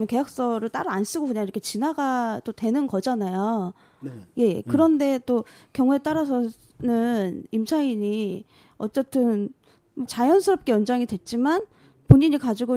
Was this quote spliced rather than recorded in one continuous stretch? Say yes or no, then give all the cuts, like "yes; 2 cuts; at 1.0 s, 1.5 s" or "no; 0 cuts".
yes; 1 cut; at 10.1 s